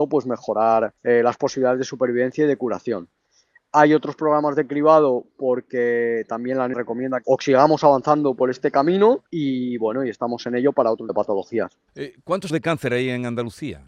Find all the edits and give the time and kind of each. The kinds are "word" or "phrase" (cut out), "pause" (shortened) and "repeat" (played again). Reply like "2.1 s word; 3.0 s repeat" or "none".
1.0 s pause; 6.7 s word; 7.2 s phrase; 9.3 s pause; 11.1 s word; 11.9 s pause; 12.5 s word